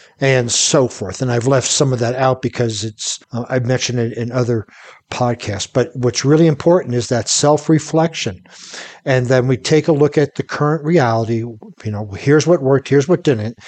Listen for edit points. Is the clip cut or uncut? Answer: cut